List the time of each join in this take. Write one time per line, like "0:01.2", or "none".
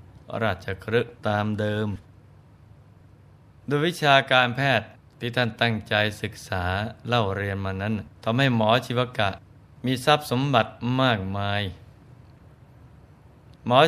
0:01.2
0:05.0
0:08.2
0:09.6